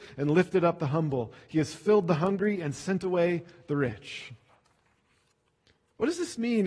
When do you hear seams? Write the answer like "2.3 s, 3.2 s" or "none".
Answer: none